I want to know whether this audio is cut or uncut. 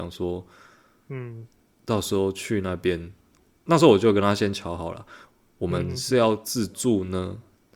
uncut